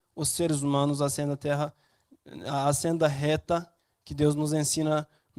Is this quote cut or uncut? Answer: uncut